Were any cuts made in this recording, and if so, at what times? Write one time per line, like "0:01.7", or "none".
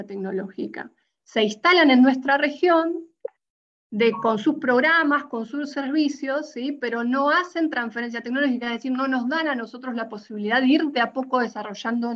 none